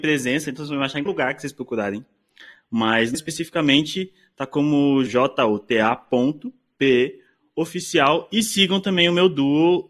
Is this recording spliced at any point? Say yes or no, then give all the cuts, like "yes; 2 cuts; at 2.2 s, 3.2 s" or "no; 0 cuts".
yes; 3 cuts; at 1.1 s, 3.1 s, 5.1 s